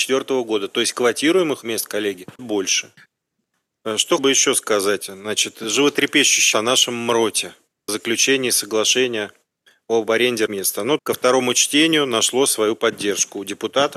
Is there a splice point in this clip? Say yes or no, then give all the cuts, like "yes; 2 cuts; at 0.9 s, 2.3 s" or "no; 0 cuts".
yes; 7 cuts; at 1.6 s, 2.4 s, 4.2 s, 6.5 s, 7.9 s, 10.5 s, 11.0 s